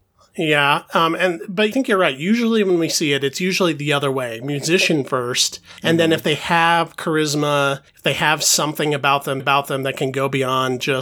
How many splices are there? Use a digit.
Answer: 4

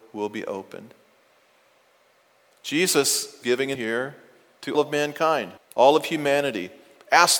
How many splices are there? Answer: 4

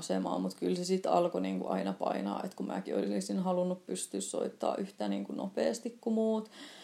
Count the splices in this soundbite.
0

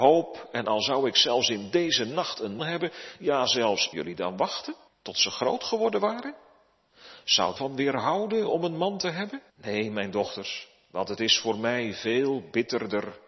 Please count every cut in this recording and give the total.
5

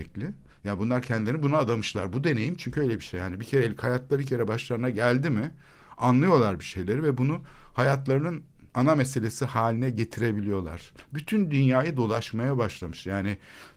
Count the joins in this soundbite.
1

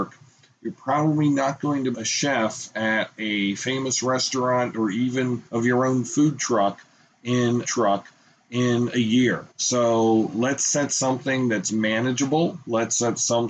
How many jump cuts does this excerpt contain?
4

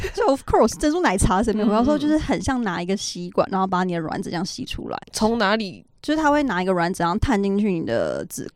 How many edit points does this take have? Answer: 1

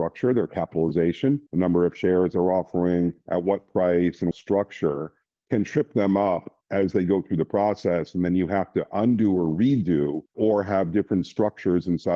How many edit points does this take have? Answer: 4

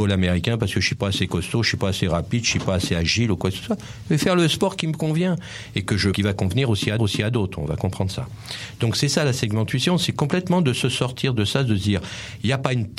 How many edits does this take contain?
2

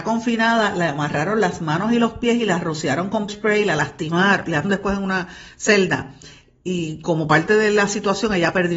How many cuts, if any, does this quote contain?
2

